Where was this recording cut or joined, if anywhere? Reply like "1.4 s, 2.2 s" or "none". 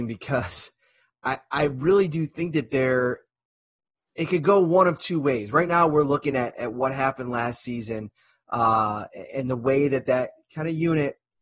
none